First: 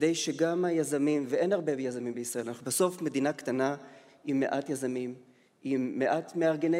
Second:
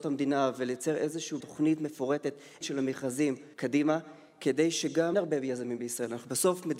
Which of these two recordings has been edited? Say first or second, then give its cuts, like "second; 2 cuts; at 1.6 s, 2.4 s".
second; 4 cuts; at 1.4 s, 2.6 s, 3.5 s, 5.1 s